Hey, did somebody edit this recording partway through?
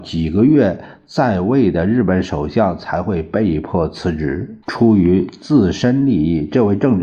yes; 1 cut; at 4.6 s

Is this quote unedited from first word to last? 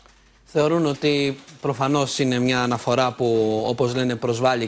yes; 0 cuts

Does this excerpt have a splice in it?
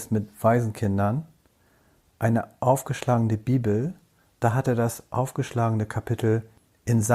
no; 0 cuts

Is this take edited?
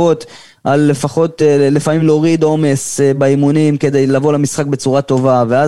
no; 0 cuts

